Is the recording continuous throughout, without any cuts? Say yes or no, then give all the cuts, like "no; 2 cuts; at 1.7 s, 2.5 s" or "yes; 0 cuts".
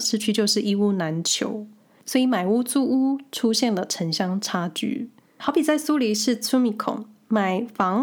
yes; 0 cuts